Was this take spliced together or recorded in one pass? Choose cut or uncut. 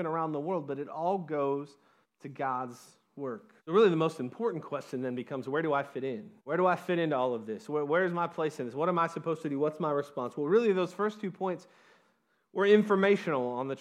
cut